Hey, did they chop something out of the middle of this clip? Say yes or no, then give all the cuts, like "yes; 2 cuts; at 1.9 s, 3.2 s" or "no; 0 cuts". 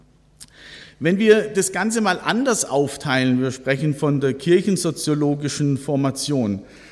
no; 0 cuts